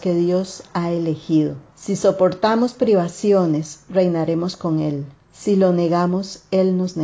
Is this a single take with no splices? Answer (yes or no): no